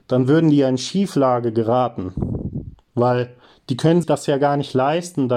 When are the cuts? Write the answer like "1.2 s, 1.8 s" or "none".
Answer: 4.0 s